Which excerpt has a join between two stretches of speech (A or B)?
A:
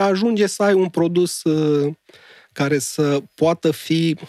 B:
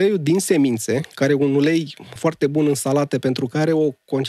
B